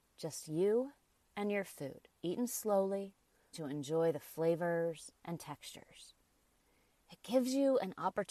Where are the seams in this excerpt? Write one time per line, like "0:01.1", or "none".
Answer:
0:01.2
0:02.2
0:03.5
0:05.2